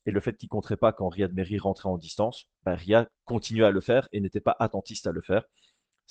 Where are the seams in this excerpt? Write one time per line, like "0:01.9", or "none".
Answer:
0:02.5
0:03.1